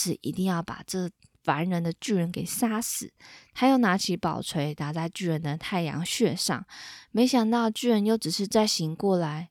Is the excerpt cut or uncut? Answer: uncut